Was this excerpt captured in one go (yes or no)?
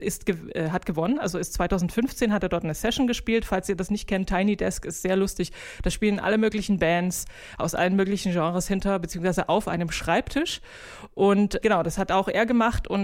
no